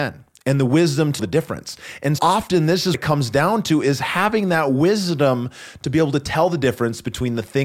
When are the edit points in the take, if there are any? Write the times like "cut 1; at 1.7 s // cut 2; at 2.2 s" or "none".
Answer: cut 1; at 1.2 s // cut 2; at 2.2 s // cut 3; at 2.9 s